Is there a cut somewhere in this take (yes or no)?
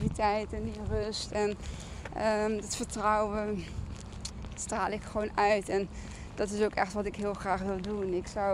no